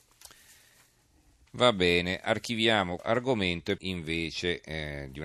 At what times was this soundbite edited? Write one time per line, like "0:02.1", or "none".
0:03.0
0:03.8